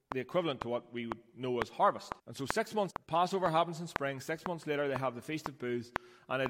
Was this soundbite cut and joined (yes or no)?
yes